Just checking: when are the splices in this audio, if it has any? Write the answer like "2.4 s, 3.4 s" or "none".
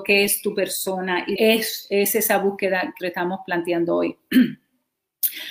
1.4 s, 3.0 s